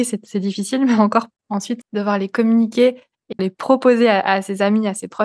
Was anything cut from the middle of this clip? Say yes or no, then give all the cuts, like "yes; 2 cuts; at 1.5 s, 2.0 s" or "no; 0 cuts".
yes; 2 cuts; at 1.8 s, 3.4 s